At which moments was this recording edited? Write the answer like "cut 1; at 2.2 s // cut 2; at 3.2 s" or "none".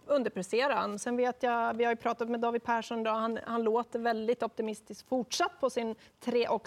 none